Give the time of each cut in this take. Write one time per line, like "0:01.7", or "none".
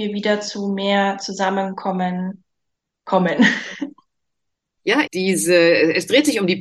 0:05.1